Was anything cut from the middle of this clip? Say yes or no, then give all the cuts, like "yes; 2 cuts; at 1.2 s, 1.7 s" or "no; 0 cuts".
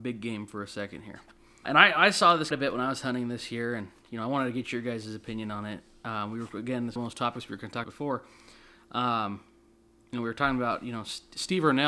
yes; 4 cuts; at 1.6 s, 2.5 s, 7.0 s, 7.8 s